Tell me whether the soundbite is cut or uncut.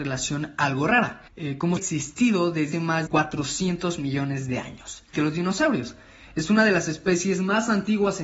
cut